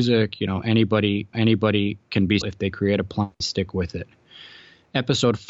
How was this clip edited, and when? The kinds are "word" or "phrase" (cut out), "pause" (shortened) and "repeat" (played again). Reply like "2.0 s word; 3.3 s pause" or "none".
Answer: 1.3 s repeat; 2.4 s word; 3.4 s word